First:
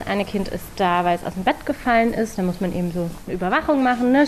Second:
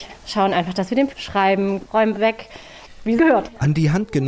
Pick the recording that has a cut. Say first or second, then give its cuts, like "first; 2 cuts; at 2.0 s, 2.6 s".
second; 3 cuts; at 1.1 s, 2.1 s, 3.2 s